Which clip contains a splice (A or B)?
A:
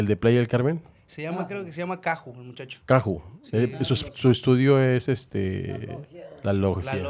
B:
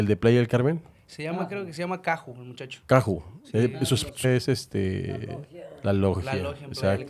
B